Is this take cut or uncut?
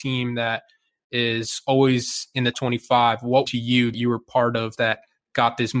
cut